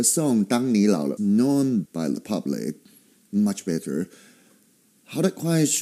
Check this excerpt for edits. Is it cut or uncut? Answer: cut